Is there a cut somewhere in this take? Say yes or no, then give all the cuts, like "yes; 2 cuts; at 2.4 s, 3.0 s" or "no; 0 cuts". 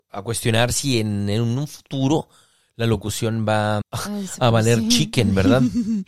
yes; 1 cut; at 3.8 s